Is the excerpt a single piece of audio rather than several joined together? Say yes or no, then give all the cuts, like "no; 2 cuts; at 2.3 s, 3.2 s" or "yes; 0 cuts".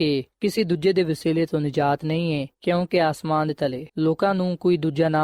no; 2 cuts; at 2.5 s, 3.9 s